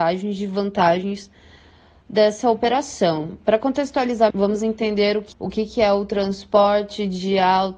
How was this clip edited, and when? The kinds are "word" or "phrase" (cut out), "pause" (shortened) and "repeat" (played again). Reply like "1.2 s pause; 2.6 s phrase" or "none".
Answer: 4.3 s word